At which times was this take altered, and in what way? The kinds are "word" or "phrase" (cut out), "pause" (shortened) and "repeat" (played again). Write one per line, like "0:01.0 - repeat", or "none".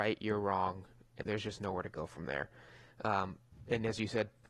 0:01.2 - word